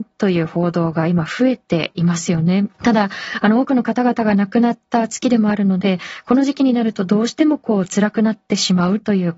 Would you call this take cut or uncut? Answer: cut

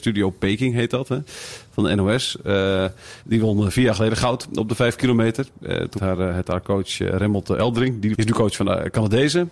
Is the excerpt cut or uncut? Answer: cut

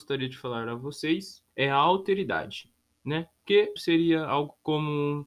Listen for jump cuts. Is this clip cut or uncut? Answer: cut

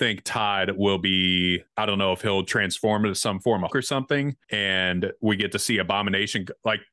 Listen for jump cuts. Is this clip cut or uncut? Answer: cut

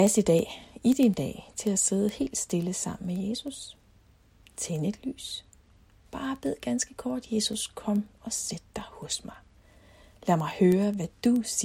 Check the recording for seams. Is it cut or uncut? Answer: uncut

